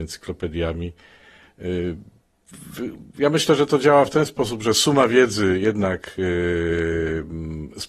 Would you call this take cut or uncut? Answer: uncut